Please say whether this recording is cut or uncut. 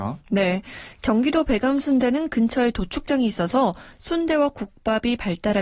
uncut